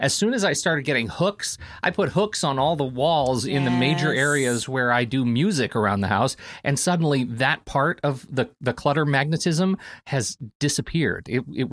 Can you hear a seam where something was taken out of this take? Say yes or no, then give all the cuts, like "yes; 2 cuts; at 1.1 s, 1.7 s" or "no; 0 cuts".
no; 0 cuts